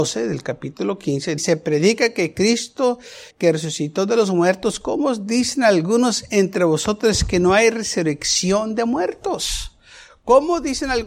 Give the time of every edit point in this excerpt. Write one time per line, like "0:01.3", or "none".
0:01.4
0:03.3